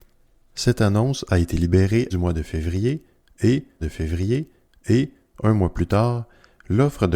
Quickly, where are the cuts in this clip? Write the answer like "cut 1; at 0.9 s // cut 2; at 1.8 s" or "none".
cut 1; at 2.1 s // cut 2; at 3.8 s